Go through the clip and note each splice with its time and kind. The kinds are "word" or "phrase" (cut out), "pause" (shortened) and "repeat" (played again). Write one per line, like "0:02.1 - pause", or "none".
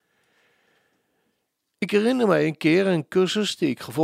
none